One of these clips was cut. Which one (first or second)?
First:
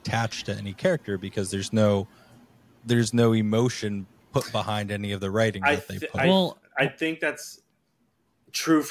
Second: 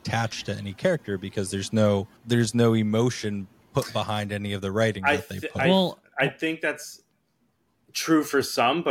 second